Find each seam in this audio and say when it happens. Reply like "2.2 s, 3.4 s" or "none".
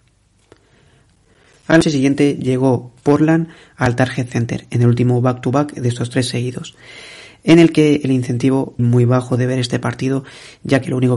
1.8 s, 8.8 s